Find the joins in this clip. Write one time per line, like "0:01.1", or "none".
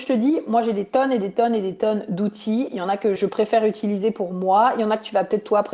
0:03.2